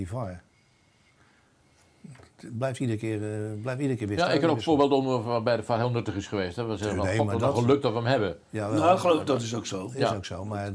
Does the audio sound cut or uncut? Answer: uncut